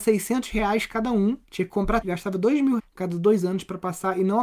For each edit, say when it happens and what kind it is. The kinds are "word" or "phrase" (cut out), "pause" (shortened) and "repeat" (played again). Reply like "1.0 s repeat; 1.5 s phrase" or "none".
1.4 s pause; 2.0 s word; 2.8 s word